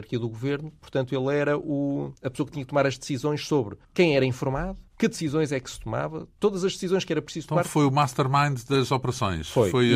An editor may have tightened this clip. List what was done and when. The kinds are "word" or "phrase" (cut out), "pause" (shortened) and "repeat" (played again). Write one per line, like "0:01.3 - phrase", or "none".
0:02.2 - pause
0:03.8 - pause
0:04.9 - pause